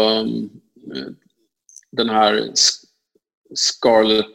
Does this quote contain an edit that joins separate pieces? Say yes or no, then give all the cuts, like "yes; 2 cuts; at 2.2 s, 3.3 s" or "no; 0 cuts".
no; 0 cuts